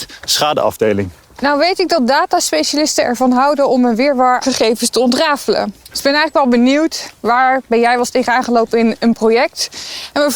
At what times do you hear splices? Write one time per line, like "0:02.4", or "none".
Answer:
0:04.4
0:05.8